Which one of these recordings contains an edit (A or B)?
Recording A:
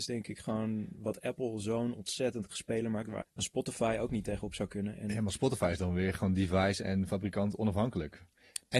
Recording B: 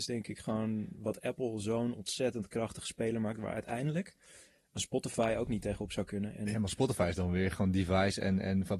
A